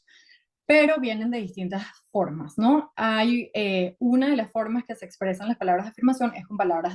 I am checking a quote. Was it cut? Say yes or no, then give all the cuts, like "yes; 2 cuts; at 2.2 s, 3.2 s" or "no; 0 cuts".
no; 0 cuts